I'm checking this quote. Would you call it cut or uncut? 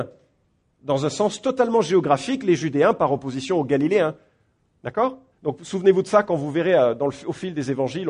cut